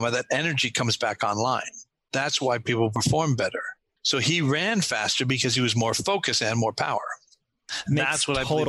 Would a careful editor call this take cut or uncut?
uncut